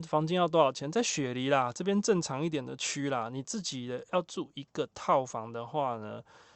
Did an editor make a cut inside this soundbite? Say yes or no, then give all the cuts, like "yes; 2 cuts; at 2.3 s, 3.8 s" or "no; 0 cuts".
no; 0 cuts